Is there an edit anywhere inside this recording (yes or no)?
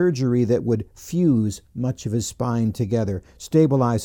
no